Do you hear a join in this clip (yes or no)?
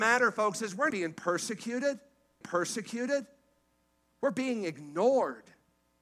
yes